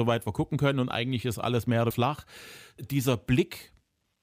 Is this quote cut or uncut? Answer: cut